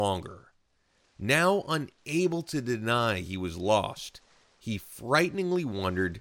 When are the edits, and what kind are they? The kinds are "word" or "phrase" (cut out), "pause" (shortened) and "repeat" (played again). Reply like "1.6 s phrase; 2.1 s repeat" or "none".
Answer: none